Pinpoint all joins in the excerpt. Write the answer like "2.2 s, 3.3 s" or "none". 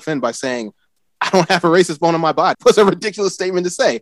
2.5 s